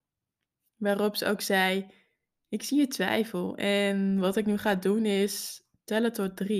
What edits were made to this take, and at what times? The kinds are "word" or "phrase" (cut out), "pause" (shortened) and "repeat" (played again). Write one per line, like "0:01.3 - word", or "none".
none